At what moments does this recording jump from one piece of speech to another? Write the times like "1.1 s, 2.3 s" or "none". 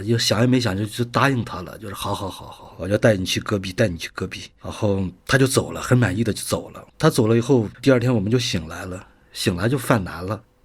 5.2 s, 6.9 s, 7.7 s